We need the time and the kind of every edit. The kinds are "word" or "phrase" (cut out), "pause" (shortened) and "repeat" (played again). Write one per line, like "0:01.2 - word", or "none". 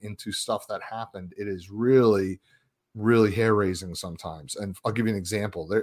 none